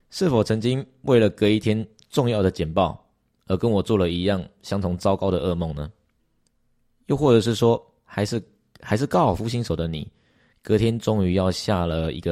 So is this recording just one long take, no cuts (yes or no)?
yes